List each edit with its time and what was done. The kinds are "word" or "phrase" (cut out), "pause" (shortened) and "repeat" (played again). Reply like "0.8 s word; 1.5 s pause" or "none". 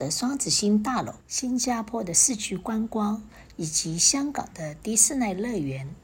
1.2 s pause